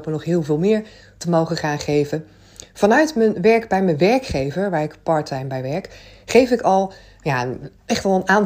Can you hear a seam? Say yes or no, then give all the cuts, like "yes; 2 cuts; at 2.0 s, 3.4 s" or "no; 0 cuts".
no; 0 cuts